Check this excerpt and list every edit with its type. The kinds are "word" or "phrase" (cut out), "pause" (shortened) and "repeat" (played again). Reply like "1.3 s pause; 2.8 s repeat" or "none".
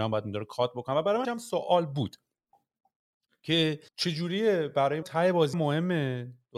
1.2 s word; 3.9 s pause; 5.0 s word; 5.5 s word